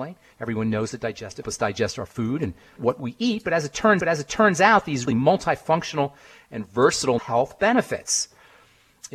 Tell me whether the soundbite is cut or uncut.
cut